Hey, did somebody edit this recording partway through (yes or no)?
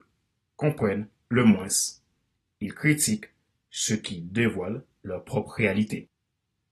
no